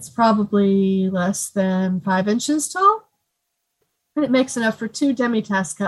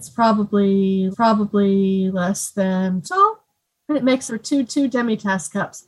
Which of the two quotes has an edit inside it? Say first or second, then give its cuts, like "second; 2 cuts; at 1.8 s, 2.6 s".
second; 5 cuts; at 1.1 s, 3.0 s, 3.7 s, 4.3 s, 4.6 s